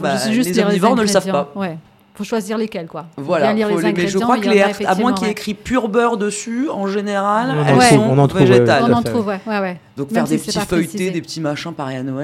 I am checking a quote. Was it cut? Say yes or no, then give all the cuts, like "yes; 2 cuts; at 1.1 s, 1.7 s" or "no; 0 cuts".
no; 0 cuts